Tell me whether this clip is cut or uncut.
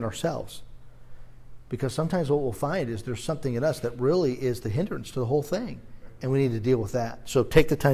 uncut